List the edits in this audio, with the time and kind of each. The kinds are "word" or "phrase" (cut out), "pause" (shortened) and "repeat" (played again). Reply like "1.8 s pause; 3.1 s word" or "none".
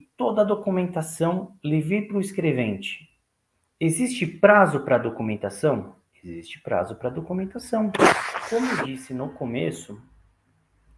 none